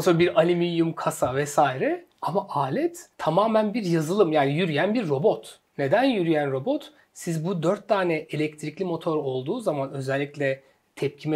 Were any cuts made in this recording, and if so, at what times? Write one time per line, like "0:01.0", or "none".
0:02.1
0:03.1
0:05.7